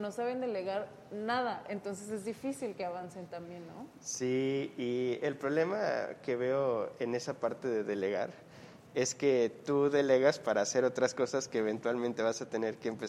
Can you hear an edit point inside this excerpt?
no; 0 cuts

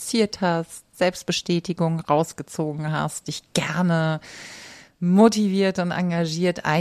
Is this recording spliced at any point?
no; 0 cuts

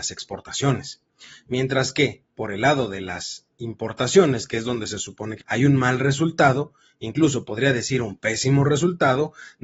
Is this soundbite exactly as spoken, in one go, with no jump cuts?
no; 1 cut; at 5.4 s

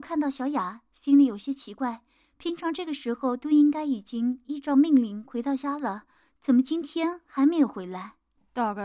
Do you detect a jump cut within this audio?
no; 0 cuts

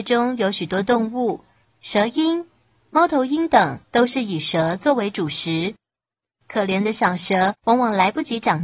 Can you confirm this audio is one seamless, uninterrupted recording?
no; 3 cuts; at 1.6 s, 3.8 s, 7.6 s

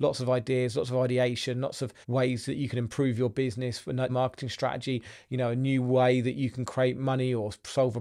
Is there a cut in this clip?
yes; 2 cuts; at 2.0 s, 4.1 s

